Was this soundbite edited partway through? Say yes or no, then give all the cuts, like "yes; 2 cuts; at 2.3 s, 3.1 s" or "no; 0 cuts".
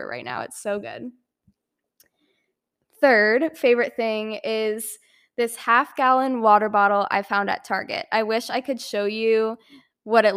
no; 0 cuts